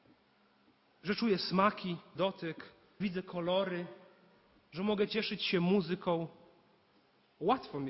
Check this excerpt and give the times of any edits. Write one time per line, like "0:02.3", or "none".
0:02.1
0:03.0